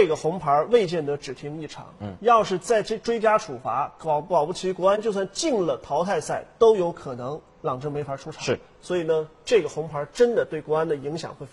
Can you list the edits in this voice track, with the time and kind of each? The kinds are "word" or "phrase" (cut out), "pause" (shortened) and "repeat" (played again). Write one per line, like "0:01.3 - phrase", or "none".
0:07.5 - pause